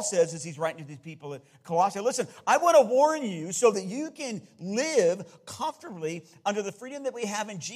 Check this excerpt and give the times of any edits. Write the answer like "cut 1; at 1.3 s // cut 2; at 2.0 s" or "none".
none